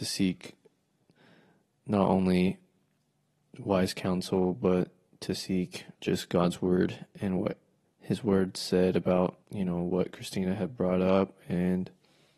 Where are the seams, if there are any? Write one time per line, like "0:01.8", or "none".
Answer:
0:05.9
0:07.8
0:09.4